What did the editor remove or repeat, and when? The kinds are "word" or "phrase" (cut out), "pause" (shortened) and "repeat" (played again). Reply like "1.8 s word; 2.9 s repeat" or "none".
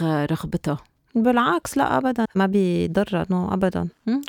2.2 s word